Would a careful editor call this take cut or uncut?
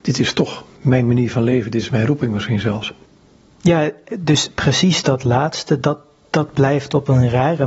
uncut